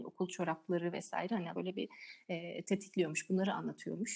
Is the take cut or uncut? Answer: cut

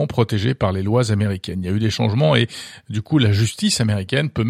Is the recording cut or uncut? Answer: uncut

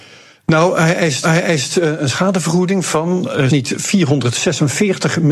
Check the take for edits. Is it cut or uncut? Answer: cut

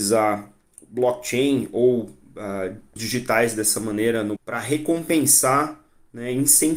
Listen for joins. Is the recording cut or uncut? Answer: cut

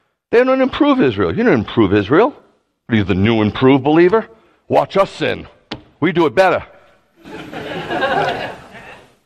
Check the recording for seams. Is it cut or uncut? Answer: uncut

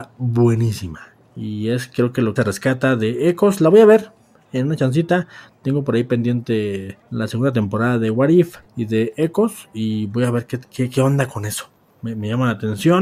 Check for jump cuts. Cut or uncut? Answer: cut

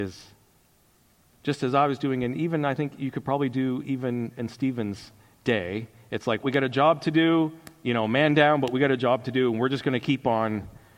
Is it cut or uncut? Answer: cut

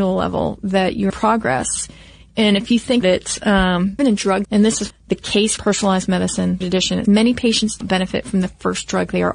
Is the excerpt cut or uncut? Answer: cut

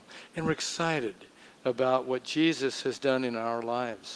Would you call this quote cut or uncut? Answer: uncut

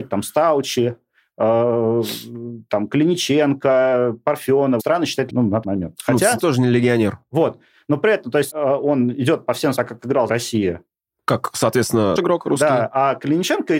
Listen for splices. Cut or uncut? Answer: cut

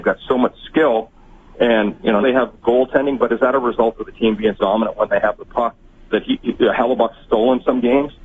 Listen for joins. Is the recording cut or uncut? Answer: cut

